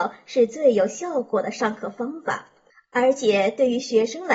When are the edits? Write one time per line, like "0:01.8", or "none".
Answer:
0:02.7